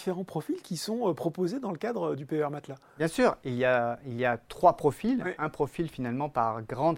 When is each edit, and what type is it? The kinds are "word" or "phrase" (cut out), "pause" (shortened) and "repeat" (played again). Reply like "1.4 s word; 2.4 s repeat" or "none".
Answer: none